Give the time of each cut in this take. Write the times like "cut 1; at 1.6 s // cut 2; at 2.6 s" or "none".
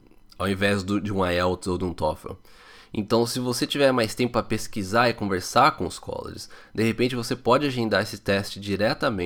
none